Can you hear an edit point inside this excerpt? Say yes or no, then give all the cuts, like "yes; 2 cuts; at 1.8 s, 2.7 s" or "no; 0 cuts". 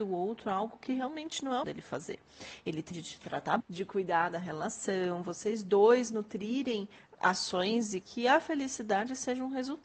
yes; 4 cuts; at 1.6 s, 2.9 s, 3.6 s, 8.0 s